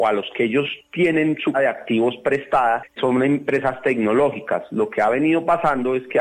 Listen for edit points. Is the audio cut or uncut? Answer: cut